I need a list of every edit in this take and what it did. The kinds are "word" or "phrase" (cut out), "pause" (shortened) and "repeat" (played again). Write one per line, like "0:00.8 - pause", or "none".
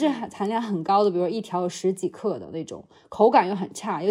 none